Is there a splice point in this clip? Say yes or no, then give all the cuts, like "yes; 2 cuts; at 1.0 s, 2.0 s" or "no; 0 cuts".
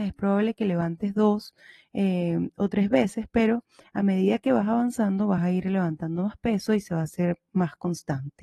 no; 0 cuts